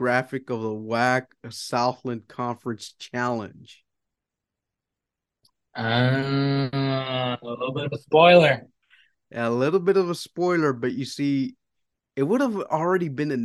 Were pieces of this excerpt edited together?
no; 0 cuts

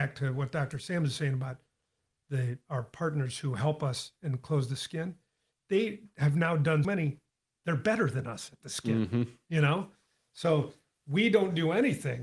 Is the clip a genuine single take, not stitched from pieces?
no; 1 cut; at 6.8 s

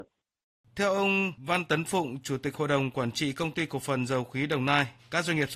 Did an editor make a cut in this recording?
no; 0 cuts

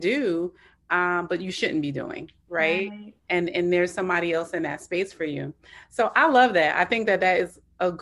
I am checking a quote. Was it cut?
yes; 1 cut; at 3.2 s

